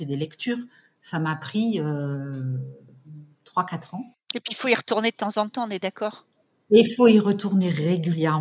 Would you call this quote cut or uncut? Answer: uncut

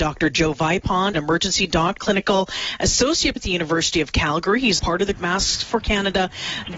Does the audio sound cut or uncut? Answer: cut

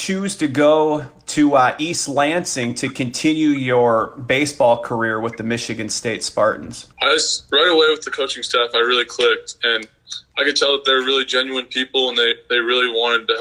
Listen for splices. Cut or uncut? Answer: cut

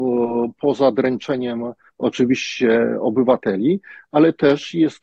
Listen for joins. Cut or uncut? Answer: uncut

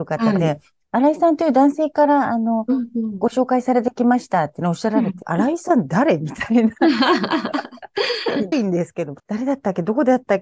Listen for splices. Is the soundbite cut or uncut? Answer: cut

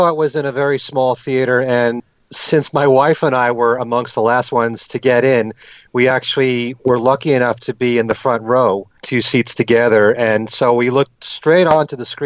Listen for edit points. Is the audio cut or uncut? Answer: uncut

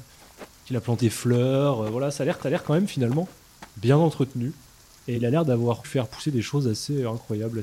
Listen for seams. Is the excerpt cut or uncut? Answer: cut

